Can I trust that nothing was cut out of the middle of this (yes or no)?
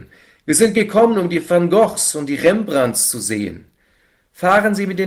yes